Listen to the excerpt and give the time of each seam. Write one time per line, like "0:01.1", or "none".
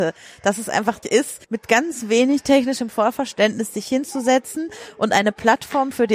0:01.0
0:01.4